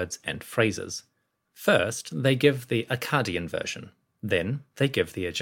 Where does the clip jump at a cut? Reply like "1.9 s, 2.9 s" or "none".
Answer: none